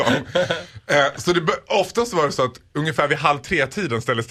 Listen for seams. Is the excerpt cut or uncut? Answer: uncut